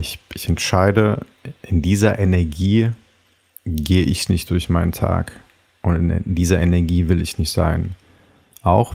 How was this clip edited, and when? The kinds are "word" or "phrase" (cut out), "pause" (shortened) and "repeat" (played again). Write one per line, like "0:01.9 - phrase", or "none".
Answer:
none